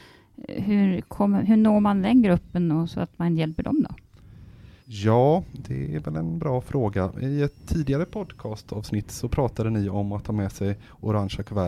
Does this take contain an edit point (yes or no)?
yes